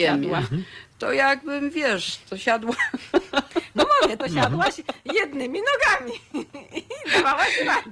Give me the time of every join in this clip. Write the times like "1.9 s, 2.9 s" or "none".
4.2 s